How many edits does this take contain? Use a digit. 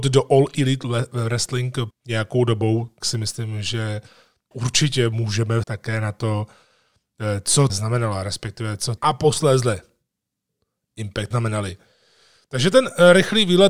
7